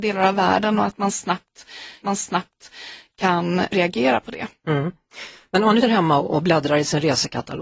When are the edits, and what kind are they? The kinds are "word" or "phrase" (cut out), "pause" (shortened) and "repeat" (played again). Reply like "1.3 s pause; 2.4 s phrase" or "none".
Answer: 2.0 s repeat; 5.8 s word